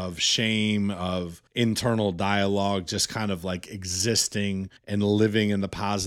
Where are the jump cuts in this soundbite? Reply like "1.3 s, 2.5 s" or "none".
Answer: 1.5 s, 4.8 s